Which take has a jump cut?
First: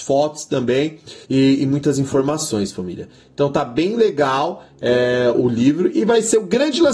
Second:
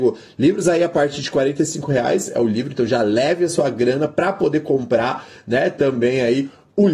first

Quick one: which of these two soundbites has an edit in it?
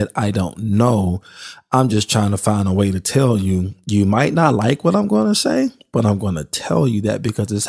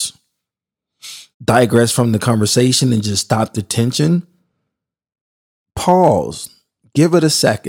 second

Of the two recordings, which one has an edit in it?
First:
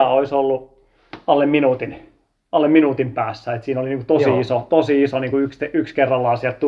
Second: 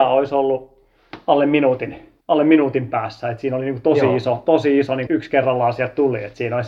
second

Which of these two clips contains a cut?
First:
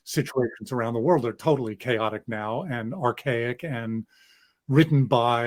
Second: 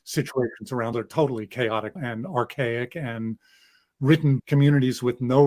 second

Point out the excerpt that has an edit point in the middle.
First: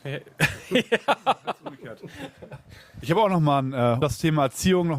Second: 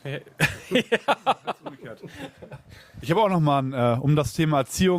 first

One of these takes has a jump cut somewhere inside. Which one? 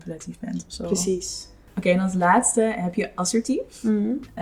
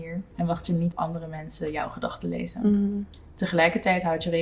second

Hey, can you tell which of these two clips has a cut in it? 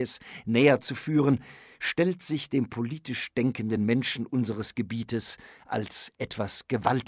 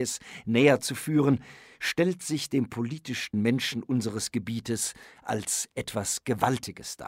second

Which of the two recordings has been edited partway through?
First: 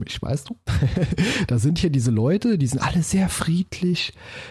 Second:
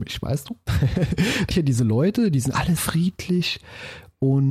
second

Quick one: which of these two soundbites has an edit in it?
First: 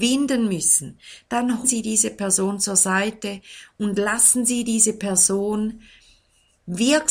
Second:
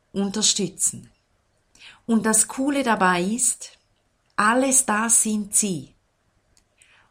first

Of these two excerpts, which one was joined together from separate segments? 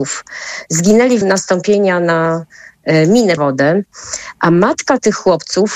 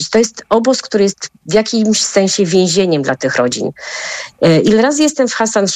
first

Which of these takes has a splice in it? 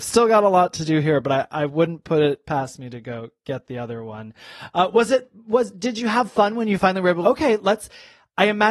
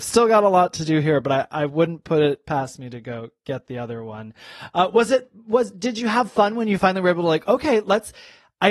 first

